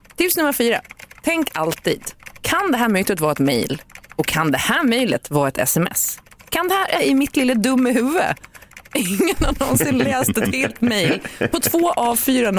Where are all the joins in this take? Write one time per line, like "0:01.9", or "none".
0:07.0